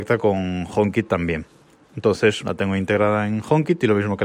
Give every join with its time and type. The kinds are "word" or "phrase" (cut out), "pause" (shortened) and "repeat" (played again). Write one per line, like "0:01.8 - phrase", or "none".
0:02.4 - word